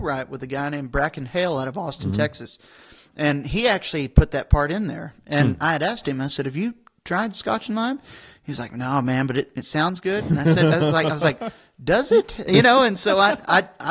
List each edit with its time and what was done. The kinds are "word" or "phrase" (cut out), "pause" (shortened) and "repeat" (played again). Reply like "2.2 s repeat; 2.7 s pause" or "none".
none